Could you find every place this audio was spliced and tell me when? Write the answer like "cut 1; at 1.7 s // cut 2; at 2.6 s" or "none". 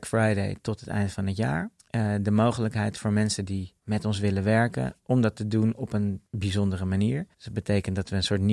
cut 1; at 1.8 s // cut 2; at 3.8 s // cut 3; at 6.3 s // cut 4; at 7.3 s